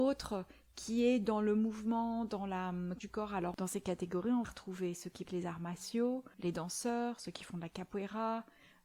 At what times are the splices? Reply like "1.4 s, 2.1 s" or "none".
3.0 s, 4.4 s, 5.2 s, 6.3 s